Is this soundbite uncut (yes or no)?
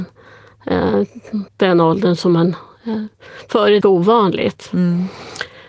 no